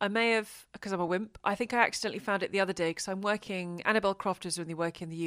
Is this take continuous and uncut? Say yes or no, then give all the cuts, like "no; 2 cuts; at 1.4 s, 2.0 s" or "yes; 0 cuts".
yes; 0 cuts